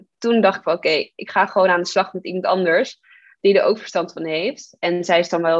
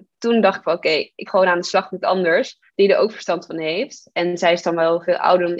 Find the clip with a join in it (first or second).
second